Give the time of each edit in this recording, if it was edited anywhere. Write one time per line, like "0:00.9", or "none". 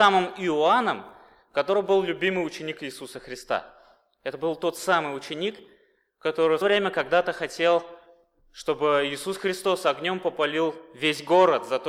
0:06.6